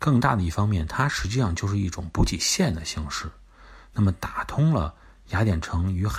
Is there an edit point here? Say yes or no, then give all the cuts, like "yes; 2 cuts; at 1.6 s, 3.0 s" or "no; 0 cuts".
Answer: no; 0 cuts